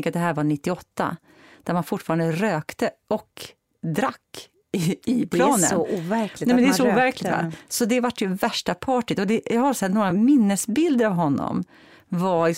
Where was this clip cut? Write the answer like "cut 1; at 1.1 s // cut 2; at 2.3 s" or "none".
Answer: none